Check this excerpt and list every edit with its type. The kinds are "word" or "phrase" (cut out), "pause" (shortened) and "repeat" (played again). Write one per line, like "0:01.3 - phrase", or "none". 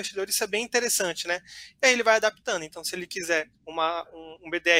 0:03.5 - pause